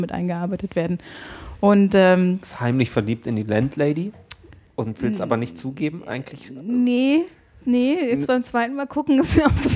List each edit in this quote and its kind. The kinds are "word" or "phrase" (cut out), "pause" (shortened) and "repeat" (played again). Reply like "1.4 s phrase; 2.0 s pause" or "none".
none

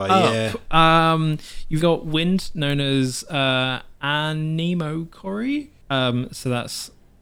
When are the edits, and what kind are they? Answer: 1.8 s word; 5.8 s pause

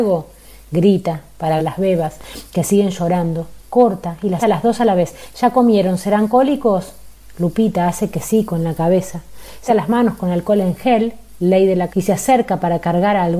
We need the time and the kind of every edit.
1.6 s phrase; 3.6 s pause; 4.4 s word; 9.7 s word; 11.9 s word

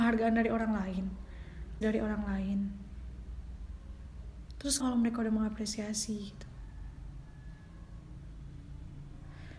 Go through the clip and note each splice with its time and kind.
1.8 s word; 4.8 s word

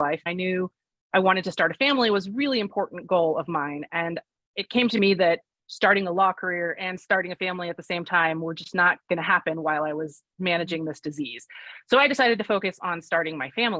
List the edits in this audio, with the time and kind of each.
none

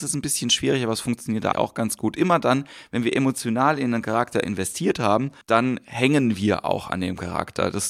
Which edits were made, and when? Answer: 1.5 s word; 5.4 s pause

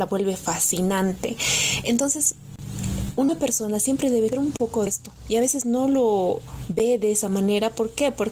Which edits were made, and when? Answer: 4.3 s word; 4.9 s word

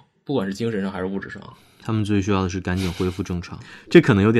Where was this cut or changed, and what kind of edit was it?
none

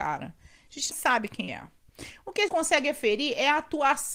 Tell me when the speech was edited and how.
0.9 s word; 1.5 s word; 2.5 s word

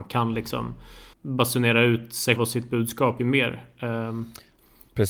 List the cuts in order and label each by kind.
1.1 s word; 2.4 s word; 3.2 s word

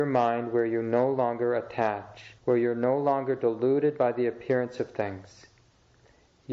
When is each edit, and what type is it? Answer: 2.4 s pause

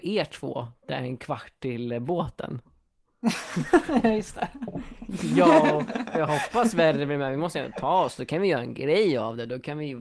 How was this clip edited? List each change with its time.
none

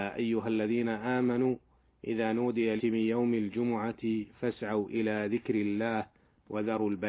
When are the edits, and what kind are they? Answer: 2.8 s word

